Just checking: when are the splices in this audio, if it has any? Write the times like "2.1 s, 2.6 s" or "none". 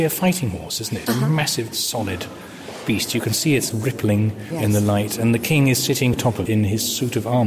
1.1 s, 1.7 s, 3.7 s, 4.5 s, 6.1 s, 6.5 s